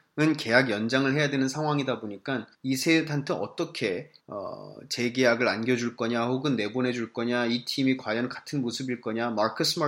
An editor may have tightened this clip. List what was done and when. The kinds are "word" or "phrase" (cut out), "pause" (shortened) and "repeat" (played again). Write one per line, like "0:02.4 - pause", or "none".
0:02.5 - pause
0:04.2 - pause